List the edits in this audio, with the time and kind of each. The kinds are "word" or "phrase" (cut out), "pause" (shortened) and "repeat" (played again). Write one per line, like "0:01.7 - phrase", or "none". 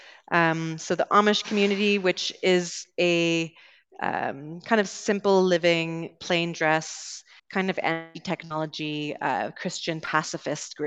0:07.4 - pause